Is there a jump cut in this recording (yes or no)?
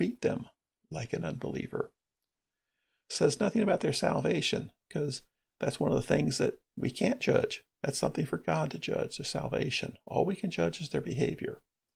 no